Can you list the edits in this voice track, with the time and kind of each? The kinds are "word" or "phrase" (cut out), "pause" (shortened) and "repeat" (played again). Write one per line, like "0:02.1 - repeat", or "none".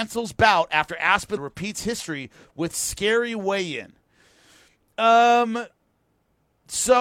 0:01.4 - word